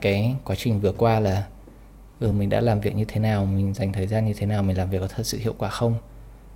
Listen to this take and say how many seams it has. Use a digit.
0